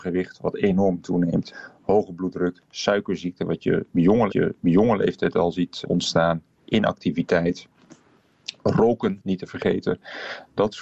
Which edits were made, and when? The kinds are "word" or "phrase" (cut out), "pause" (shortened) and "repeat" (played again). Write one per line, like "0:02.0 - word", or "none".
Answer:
0:04.3 - repeat
0:05.8 - word